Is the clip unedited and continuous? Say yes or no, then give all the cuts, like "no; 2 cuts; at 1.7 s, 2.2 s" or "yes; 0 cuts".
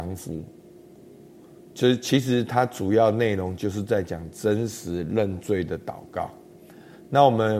yes; 0 cuts